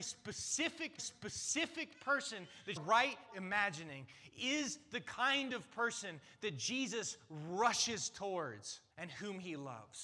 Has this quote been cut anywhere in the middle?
yes; 4 cuts; at 1.0 s, 2.8 s, 3.3 s, 8.9 s

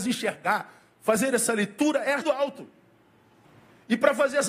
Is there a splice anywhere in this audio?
yes; 2 cuts; at 2.2 s, 3.4 s

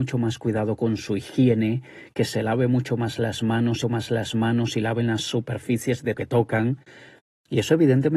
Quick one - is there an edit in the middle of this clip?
yes; 2 cuts; at 3.8 s, 6.2 s

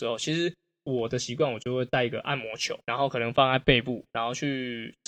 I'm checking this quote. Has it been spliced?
yes; 2 cuts; at 2.8 s, 4.1 s

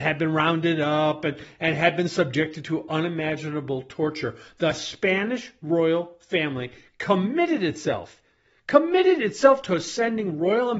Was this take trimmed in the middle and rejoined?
no; 0 cuts

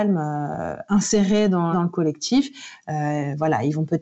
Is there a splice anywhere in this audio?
yes; 1 cut; at 1.7 s

